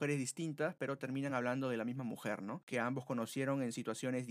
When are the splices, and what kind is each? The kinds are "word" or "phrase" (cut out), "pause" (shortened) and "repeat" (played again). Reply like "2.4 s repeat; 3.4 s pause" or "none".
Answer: none